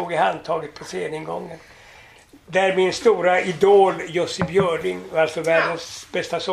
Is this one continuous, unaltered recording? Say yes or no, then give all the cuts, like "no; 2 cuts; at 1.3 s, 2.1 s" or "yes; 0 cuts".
yes; 0 cuts